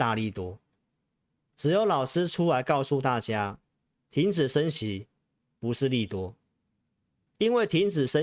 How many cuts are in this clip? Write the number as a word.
zero